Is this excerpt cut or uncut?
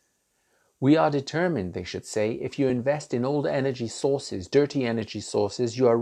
uncut